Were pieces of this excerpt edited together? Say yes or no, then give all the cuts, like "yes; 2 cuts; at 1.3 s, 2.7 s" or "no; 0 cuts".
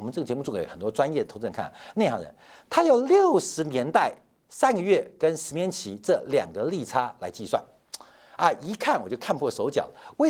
no; 0 cuts